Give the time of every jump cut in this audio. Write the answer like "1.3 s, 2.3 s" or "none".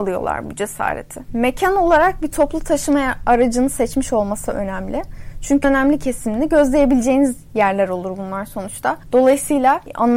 5.6 s